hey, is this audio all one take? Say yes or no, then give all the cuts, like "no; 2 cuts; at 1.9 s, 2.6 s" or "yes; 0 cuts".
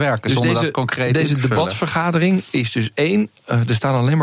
yes; 0 cuts